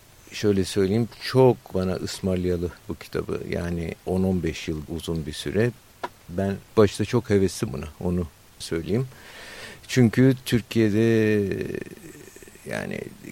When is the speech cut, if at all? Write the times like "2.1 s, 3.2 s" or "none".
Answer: 1.7 s, 2.8 s, 4.0 s, 4.9 s, 6.7 s, 7.7 s, 8.6 s